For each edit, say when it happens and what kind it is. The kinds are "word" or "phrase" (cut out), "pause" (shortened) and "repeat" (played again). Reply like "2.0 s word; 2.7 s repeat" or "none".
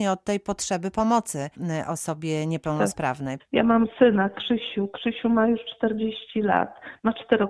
none